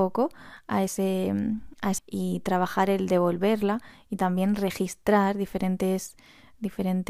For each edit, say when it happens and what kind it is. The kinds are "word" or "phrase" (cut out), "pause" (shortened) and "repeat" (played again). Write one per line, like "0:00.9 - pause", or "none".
0:02.0 - word